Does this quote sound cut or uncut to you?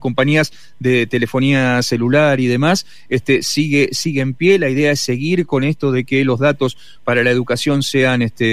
uncut